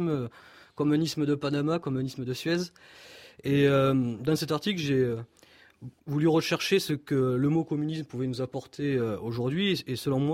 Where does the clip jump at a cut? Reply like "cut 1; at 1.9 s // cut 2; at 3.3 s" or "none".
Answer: cut 1; at 6.0 s